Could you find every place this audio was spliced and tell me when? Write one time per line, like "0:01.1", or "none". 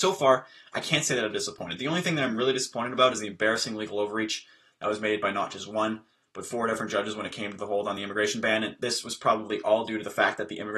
none